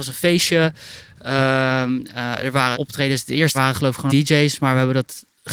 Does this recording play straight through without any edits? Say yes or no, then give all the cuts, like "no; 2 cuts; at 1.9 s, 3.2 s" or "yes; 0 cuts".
no; 3 cuts; at 2.7 s, 3.5 s, 4.1 s